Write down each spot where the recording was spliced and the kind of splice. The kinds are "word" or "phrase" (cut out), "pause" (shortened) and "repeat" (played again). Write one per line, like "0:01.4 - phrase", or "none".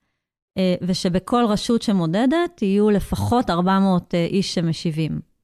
none